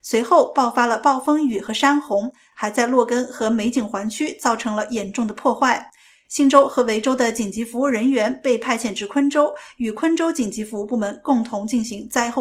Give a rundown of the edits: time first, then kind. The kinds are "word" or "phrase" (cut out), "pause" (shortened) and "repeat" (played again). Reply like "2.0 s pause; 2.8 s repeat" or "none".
none